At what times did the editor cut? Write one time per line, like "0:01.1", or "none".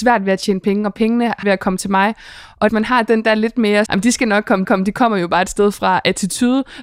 0:01.4
0:02.7
0:03.9
0:04.6

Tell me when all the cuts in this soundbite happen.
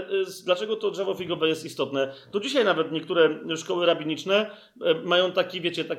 none

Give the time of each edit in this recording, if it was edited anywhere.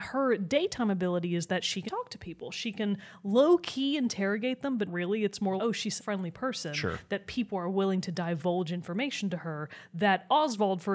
0:01.9
0:04.9
0:05.6
0:06.0

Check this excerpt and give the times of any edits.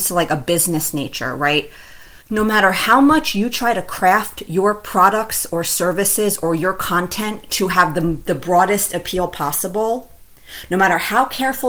0:02.2

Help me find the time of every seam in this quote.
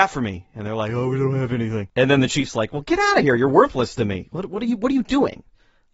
none

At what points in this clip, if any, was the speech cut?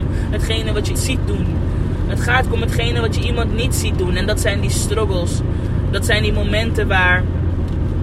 0:00.9
0:02.4

